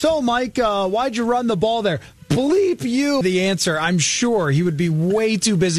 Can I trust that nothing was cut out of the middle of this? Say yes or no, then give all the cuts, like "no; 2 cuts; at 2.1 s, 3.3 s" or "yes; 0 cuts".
no; 1 cut; at 3.2 s